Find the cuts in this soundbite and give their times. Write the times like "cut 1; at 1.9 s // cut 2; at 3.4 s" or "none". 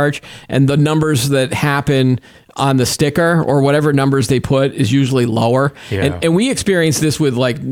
none